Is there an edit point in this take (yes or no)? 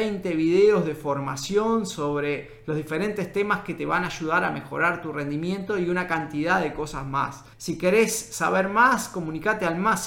yes